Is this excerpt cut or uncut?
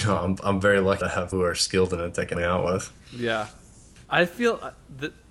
cut